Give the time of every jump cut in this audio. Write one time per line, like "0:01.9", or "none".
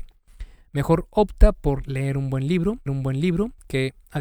0:02.9